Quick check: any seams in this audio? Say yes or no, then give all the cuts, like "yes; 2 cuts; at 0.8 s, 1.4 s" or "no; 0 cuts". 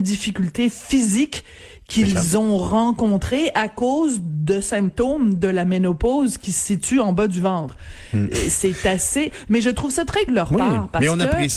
yes; 1 cut; at 10.3 s